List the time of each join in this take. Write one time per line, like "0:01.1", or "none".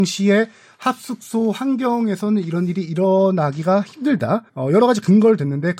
0:04.5